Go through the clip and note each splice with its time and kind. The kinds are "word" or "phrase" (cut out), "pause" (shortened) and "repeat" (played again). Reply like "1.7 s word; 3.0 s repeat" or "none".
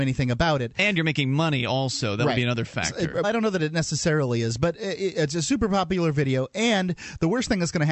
3.2 s word